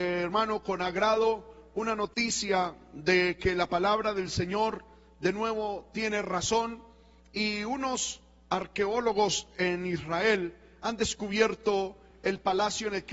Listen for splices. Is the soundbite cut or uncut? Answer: uncut